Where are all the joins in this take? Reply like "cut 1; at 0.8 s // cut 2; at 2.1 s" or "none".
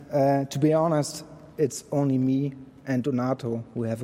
cut 1; at 1.5 s